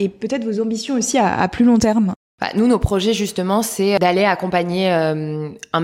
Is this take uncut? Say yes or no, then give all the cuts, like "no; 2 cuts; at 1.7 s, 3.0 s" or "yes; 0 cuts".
yes; 0 cuts